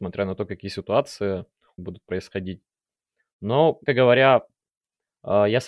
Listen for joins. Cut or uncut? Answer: cut